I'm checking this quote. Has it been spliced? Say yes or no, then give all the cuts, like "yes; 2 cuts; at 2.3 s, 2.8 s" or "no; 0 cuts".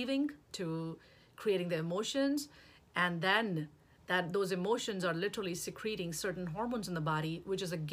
no; 0 cuts